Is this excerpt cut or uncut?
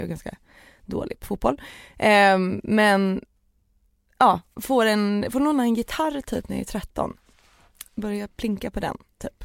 uncut